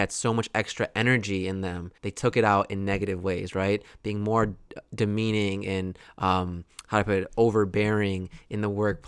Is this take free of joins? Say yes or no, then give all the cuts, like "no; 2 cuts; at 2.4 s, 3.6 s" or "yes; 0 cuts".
no; 1 cut; at 2.0 s